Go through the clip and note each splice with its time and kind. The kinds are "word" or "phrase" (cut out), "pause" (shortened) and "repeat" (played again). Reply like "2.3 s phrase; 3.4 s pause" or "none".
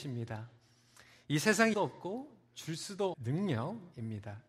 1.7 s phrase; 3.1 s word